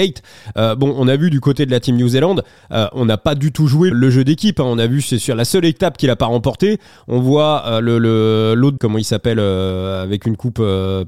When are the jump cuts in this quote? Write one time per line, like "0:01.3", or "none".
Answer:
0:03.9
0:08.8